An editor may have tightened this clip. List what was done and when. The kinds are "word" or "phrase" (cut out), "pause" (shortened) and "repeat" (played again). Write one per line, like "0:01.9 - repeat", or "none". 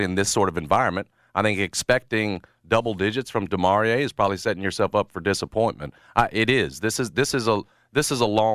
none